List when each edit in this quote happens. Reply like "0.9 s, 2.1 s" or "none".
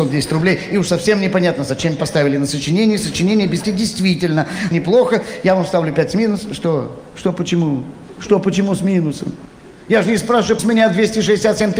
2.0 s, 3.6 s, 4.7 s, 10.6 s